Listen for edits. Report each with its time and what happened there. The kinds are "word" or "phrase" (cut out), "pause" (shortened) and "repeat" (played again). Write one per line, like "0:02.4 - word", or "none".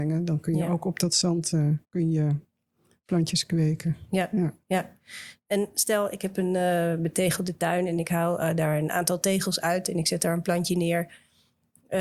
0:01.8 - pause